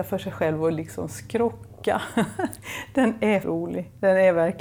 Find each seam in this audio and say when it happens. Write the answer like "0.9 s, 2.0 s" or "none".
3.4 s